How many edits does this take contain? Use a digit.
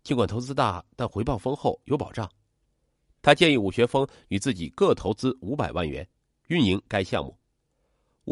0